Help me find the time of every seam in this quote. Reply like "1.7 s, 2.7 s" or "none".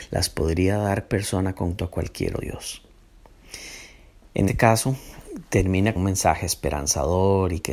1.1 s, 1.8 s, 2.4 s, 4.5 s, 6.0 s